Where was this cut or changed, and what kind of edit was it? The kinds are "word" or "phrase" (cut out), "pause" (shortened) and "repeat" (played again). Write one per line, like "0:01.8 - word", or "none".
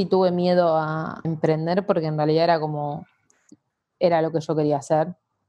0:01.2 - word